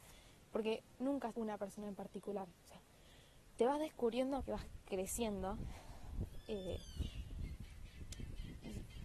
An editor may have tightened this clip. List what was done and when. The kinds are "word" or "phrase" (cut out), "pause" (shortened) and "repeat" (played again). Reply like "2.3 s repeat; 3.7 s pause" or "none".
1.3 s word; 4.4 s word